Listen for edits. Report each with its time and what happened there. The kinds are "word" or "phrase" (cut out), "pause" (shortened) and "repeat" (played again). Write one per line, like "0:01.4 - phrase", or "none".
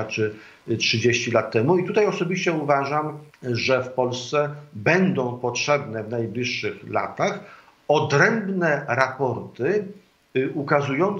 0:03.3 - pause

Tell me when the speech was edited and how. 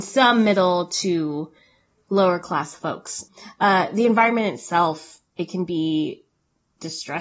none

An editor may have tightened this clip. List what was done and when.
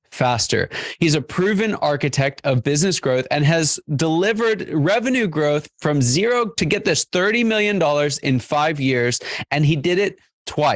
none

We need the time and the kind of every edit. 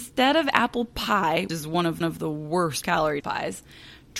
0:01.5 - word
0:02.0 - repeat
0:02.8 - word
0:03.2 - word

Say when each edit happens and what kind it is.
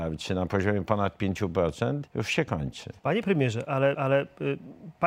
0:02.1 - pause
0:03.0 - pause
0:03.9 - repeat

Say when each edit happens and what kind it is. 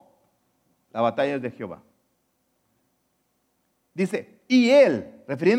none

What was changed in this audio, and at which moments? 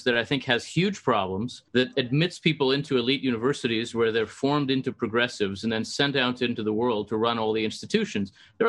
0:01.7 - pause

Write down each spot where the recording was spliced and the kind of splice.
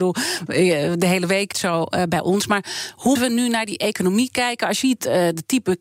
0:01.5 - word
0:03.2 - word
0:04.8 - phrase

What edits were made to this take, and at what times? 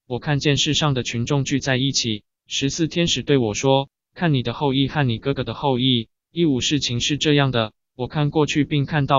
none

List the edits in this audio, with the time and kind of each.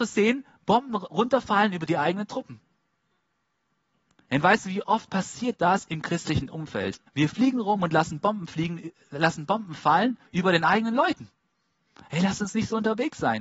0:07.1 - pause
0:10.3 - pause

